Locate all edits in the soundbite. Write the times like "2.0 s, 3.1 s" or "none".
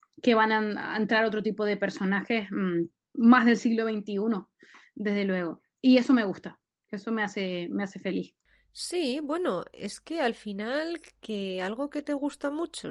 none